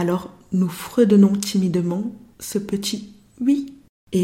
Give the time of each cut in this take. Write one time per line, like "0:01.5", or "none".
0:02.3